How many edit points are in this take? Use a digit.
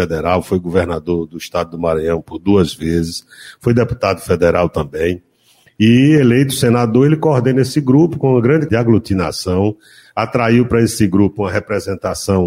1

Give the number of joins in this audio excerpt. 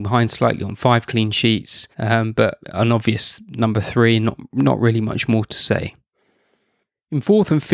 2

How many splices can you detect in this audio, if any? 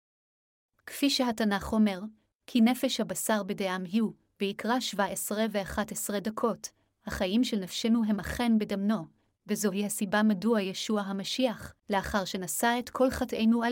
1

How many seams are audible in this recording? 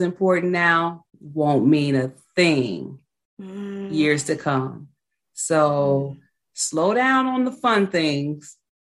1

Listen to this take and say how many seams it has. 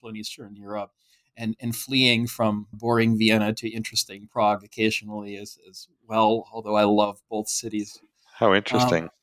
1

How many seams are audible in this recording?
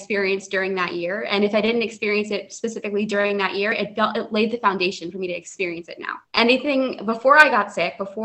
1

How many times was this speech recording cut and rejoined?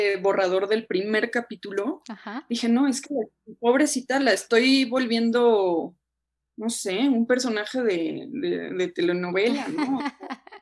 0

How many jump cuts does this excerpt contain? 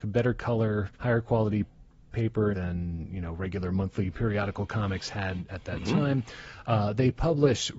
2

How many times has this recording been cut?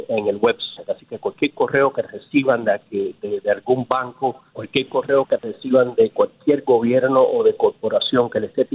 2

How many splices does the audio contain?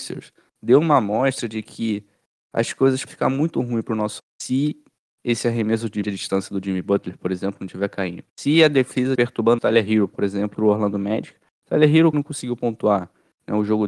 8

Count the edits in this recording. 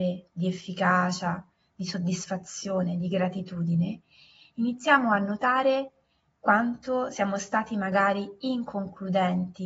0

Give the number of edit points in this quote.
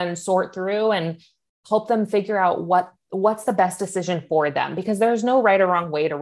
0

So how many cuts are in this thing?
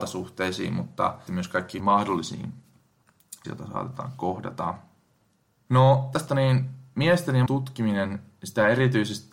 5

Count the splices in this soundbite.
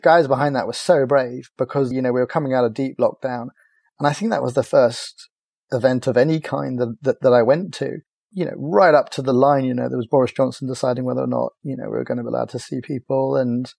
1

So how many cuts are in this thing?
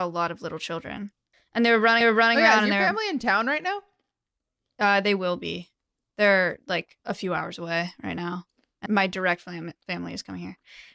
4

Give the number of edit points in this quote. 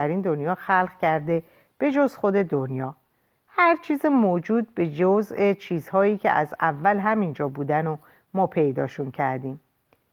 0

